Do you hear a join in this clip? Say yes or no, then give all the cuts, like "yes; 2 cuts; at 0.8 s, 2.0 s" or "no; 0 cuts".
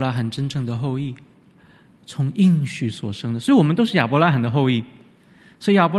no; 0 cuts